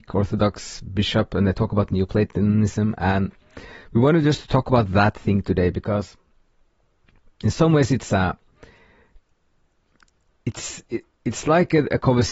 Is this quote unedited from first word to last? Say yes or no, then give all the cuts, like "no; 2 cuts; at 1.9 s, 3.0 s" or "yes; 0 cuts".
yes; 0 cuts